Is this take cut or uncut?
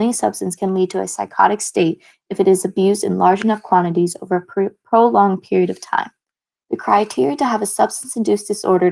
uncut